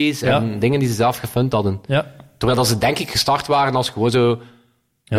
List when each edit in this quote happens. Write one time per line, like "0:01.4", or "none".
none